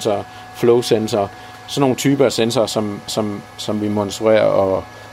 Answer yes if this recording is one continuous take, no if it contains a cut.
no